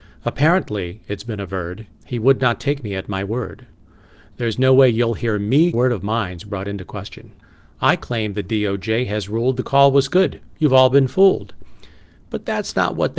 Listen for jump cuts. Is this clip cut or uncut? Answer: cut